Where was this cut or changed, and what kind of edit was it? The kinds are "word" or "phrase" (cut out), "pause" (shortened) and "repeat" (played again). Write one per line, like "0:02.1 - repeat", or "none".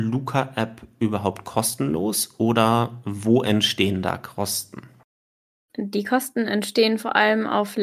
none